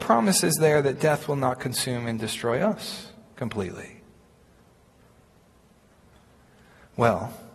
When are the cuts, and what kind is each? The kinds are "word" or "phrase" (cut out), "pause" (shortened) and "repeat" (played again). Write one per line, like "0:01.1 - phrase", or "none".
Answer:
none